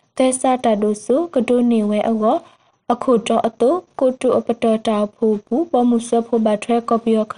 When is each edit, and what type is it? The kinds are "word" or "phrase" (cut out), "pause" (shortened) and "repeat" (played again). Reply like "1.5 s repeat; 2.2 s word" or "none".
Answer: none